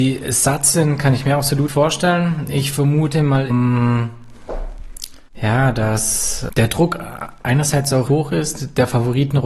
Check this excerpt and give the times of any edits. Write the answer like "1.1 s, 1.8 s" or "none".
1.7 s, 3.5 s, 5.3 s, 6.5 s, 8.1 s